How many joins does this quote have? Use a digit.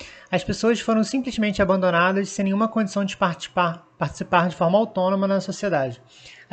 0